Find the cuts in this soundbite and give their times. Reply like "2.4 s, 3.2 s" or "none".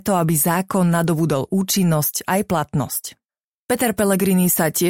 none